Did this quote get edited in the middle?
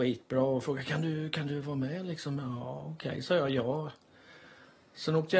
no; 0 cuts

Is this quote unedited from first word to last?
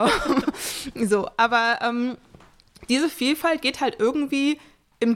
yes; 0 cuts

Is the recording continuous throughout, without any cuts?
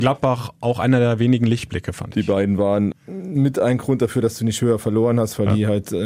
no; 1 cut; at 2.9 s

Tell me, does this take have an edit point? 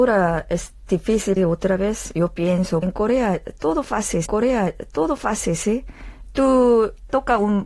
yes; 3 cuts; at 1.4 s, 2.8 s, 4.3 s

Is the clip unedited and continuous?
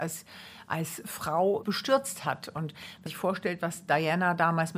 no; 2 cuts; at 1.6 s, 3.1 s

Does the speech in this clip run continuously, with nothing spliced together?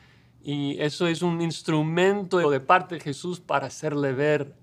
no; 1 cut; at 2.4 s

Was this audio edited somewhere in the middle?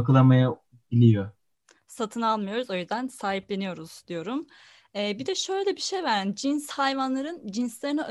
no; 0 cuts

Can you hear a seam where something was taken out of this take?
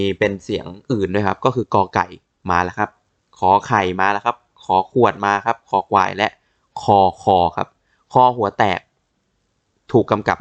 no; 0 cuts

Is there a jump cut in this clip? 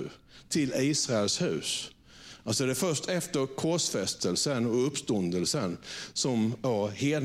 no; 0 cuts

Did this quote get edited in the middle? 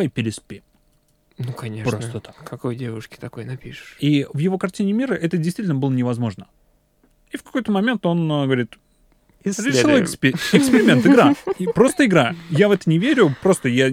no; 0 cuts

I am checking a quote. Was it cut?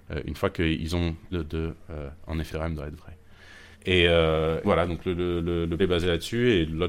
yes; 5 cuts; at 1.3 s, 2.5 s, 3.7 s, 4.6 s, 5.8 s

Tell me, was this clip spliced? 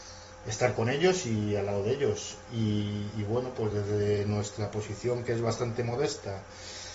no; 0 cuts

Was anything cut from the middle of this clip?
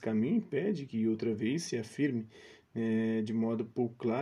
no; 0 cuts

